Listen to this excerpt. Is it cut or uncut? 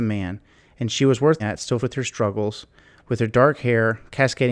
cut